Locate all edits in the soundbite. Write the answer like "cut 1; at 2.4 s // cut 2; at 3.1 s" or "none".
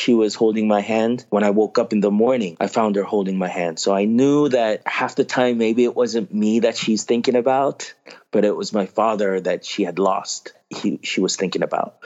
none